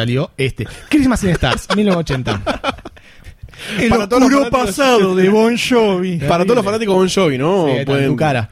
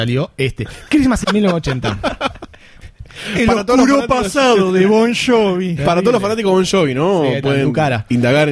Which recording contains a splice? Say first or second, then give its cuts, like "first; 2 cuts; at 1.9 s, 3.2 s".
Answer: second; 1 cut; at 1.2 s